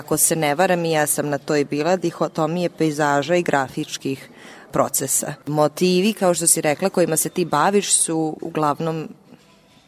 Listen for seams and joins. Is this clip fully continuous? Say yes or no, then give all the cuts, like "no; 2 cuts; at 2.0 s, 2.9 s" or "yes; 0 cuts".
yes; 0 cuts